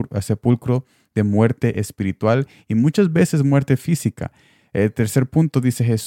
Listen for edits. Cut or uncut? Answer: uncut